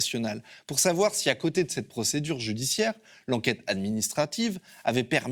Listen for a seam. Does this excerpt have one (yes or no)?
no